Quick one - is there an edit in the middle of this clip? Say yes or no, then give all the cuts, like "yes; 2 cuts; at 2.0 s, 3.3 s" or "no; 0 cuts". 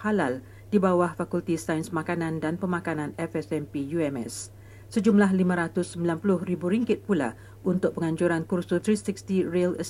yes; 1 cut; at 8.8 s